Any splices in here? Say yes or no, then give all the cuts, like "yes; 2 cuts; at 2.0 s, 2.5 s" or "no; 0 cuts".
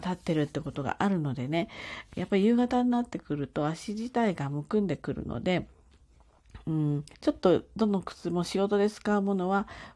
yes; 1 cut; at 7.1 s